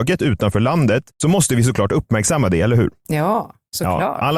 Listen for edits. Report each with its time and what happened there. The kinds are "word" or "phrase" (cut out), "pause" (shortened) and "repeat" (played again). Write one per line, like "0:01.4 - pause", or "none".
0:01.1 - pause